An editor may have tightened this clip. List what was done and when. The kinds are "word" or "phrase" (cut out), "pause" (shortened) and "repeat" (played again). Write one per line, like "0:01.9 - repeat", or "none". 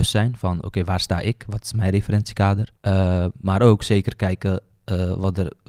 0:02.8 - pause